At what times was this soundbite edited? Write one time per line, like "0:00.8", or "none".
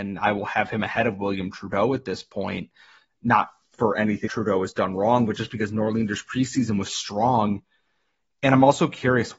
0:04.3
0:06.9